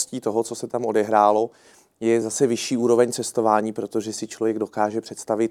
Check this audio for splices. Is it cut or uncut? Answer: uncut